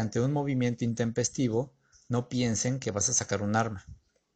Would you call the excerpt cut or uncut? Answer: uncut